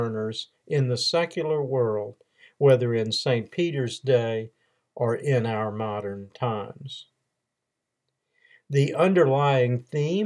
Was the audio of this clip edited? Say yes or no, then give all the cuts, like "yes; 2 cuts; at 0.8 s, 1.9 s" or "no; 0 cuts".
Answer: no; 0 cuts